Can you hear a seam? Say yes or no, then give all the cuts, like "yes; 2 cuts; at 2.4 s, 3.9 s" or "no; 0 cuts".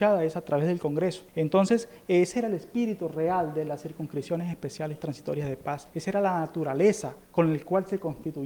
yes; 3 cuts; at 1.3 s, 5.9 s, 7.2 s